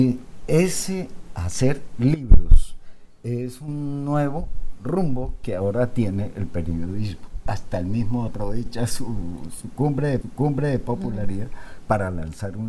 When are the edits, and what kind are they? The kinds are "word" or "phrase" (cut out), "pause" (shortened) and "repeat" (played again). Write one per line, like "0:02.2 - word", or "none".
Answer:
0:08.3 - phrase
0:10.2 - repeat